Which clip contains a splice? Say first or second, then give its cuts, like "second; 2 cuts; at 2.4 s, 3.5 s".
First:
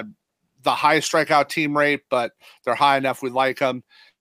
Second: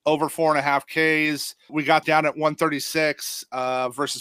second; 2 cuts; at 1.7 s, 2.0 s